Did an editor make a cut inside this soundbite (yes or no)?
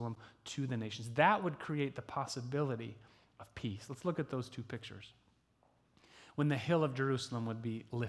no